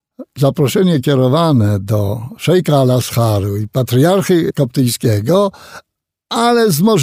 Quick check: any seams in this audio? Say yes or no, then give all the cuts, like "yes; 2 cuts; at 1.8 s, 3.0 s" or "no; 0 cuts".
no; 0 cuts